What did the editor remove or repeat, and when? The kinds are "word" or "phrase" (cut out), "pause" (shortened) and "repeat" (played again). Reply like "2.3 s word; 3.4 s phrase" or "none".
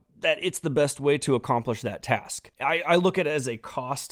2.5 s pause